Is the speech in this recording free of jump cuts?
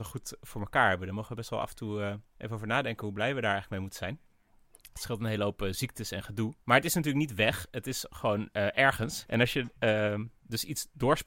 no; 2 cuts; at 2.3 s, 6.6 s

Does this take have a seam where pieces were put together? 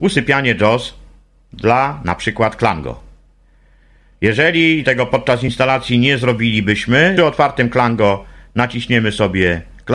yes; 2 cuts; at 4.8 s, 7.2 s

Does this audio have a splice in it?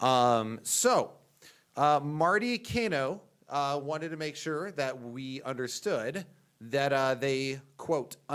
no; 0 cuts

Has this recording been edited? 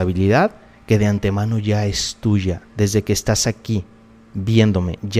yes; 1 cut; at 2.7 s

